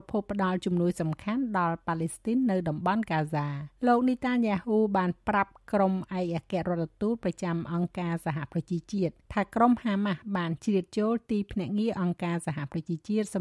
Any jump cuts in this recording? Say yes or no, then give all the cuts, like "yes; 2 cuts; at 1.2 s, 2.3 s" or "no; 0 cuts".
yes; 2 cuts; at 3.8 s, 9.2 s